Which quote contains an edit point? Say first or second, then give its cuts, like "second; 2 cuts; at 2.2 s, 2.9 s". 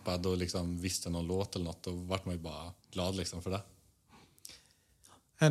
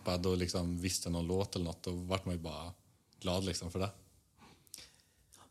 first; 1 cut; at 2.8 s